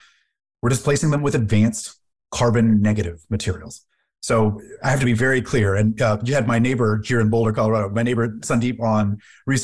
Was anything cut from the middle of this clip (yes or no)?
no